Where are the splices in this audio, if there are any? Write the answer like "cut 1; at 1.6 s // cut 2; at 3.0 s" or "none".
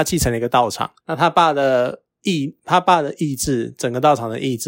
cut 1; at 1.0 s